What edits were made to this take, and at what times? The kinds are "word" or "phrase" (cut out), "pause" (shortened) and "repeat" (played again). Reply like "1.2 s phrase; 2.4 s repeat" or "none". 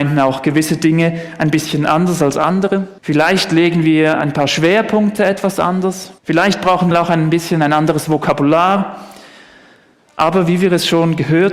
3.0 s pause; 6.2 s pause; 6.9 s phrase